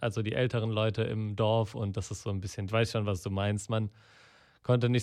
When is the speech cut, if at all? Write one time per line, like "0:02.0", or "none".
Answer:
0:02.7